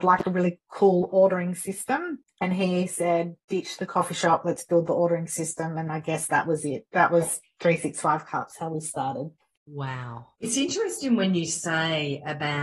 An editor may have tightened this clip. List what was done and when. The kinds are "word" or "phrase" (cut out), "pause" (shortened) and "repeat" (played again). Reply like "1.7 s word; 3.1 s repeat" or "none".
5.9 s word; 10.3 s pause